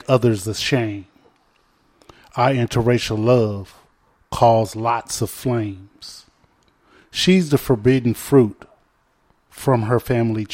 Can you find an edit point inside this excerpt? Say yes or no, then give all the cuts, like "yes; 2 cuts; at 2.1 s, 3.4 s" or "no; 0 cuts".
no; 0 cuts